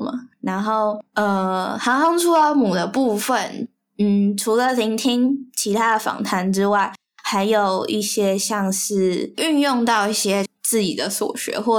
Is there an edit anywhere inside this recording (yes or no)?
no